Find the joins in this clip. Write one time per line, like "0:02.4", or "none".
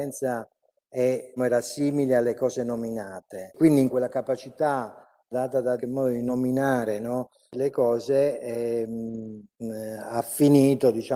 0:01.4
0:03.9
0:05.3
0:05.8
0:09.5